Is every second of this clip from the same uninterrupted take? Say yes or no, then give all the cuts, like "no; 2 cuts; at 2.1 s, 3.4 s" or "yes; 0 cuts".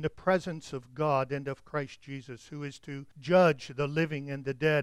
no; 1 cut; at 3.1 s